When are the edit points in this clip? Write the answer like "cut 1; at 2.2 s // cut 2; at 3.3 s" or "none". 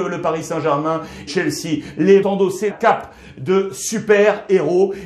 cut 1; at 1.3 s // cut 2; at 2.2 s // cut 3; at 2.7 s